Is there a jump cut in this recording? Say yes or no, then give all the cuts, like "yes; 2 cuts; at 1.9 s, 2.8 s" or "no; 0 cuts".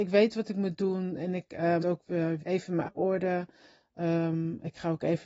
yes; 3 cuts; at 1.8 s, 2.4 s, 2.9 s